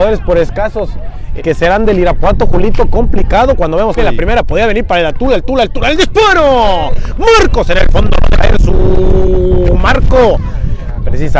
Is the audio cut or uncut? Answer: cut